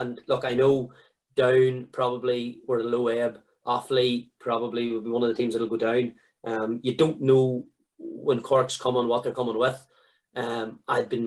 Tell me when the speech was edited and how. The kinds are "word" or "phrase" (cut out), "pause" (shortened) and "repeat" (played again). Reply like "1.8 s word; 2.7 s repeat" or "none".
none

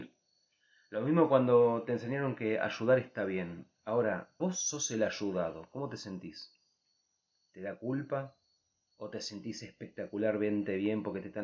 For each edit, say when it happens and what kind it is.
4.4 s word

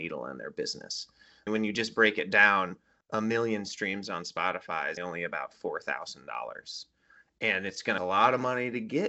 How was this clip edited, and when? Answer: 1.5 s word; 5.0 s word; 8.0 s phrase

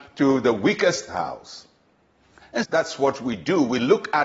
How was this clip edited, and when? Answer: 1.1 s phrase; 2.6 s word

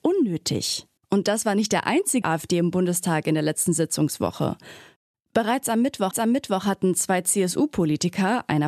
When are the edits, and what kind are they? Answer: 1.0 s pause; 2.2 s phrase; 6.1 s repeat

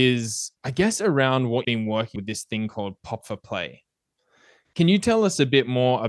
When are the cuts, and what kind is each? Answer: 1.6 s word; 2.2 s word; 3.2 s word

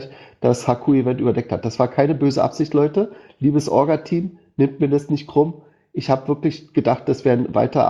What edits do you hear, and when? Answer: none

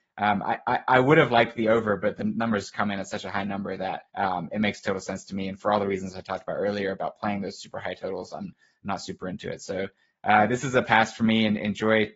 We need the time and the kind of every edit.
4.1 s pause

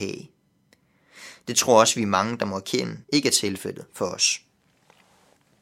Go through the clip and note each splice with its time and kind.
3.0 s pause

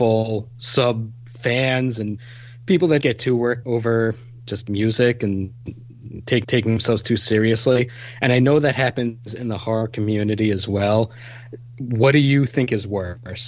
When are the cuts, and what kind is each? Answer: 3.0 s word; 3.6 s word; 6.4 s repeat

